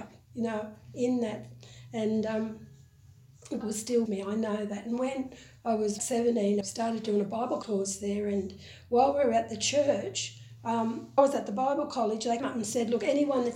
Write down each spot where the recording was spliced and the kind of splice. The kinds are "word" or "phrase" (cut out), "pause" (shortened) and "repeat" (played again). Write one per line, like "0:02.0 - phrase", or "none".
0:03.6 - word
0:04.1 - word
0:06.0 - word
0:06.6 - word
0:07.6 - word
0:11.2 - word
0:12.4 - word